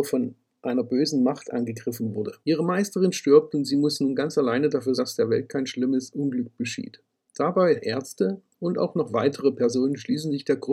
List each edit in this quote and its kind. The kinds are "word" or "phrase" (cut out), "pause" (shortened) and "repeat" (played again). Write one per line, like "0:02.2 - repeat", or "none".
0:02.4 - pause
0:05.0 - word
0:07.8 - phrase

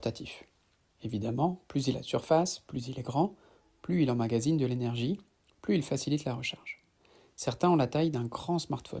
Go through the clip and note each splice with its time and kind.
none

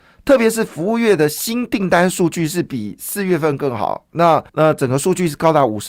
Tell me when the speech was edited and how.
0:04.5 - pause

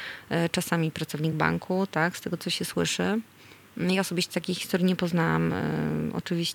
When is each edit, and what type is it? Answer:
none

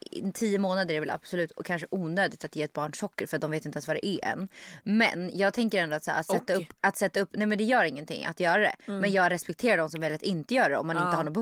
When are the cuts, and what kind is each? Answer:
none

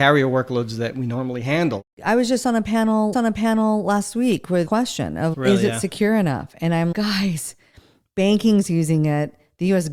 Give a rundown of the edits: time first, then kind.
0:03.1 - repeat
0:04.7 - phrase
0:05.3 - word
0:06.9 - word

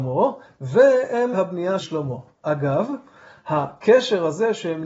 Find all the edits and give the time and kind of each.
0:01.3 - phrase
0:01.8 - word

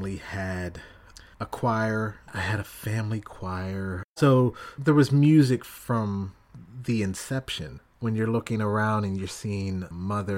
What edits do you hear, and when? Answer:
0:01.3 - pause
0:02.2 - pause

